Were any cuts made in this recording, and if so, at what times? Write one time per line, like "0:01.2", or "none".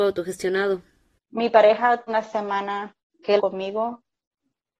0:02.1
0:03.0
0:03.4